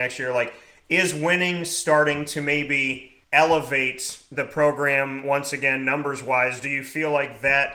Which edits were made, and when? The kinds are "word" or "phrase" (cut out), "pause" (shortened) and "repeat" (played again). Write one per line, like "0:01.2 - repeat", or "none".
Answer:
0:03.2 - pause